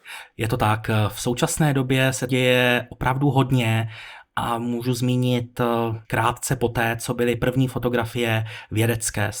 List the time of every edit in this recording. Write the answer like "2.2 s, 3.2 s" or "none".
2.3 s, 6.0 s, 7.4 s